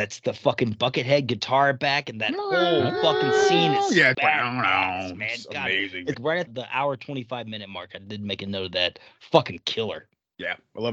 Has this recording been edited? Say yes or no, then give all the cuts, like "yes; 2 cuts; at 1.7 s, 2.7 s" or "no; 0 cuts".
yes; 3 cuts; at 4.1 s, 6.1 s, 6.5 s